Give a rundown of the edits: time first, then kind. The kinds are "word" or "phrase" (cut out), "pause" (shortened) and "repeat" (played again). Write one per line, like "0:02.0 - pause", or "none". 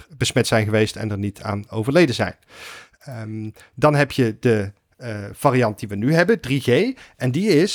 none